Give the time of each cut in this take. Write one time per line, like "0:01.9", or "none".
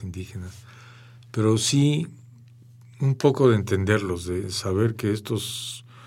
none